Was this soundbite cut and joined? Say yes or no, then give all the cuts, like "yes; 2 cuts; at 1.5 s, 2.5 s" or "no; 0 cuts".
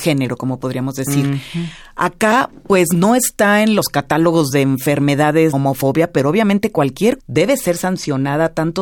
yes; 2 cuts; at 5.5 s, 7.2 s